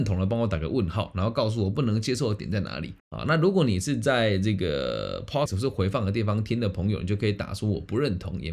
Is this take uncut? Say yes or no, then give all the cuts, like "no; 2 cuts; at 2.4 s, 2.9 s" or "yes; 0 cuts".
no; 2 cuts; at 3.0 s, 5.5 s